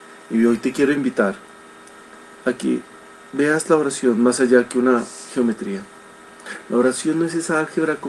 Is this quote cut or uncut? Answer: uncut